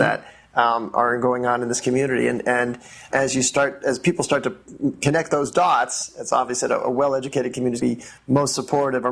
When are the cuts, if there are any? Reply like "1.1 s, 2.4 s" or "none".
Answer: 3.1 s, 7.8 s